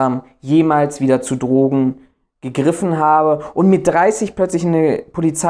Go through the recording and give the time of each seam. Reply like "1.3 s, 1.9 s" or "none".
none